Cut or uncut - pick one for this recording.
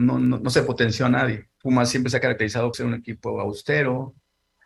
cut